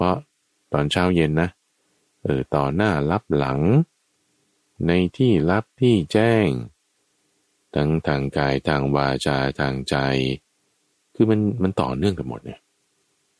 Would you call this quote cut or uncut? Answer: uncut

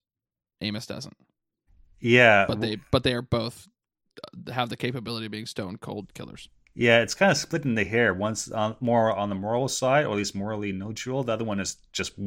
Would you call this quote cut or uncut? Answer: uncut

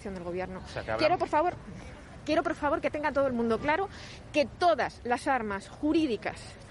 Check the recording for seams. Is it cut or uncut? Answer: uncut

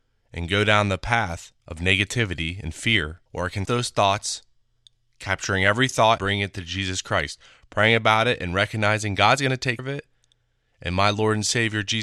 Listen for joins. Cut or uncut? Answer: cut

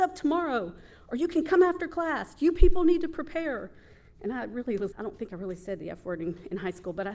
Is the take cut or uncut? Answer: cut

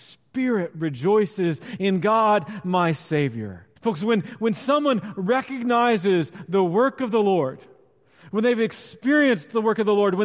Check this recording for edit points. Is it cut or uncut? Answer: cut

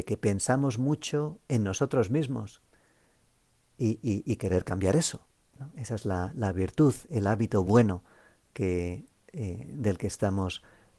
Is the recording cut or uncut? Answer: uncut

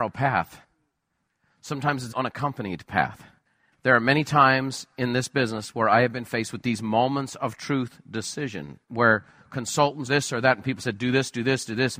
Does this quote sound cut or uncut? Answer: cut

